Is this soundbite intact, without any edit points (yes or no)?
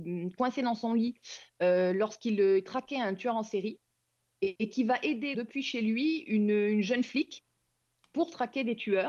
no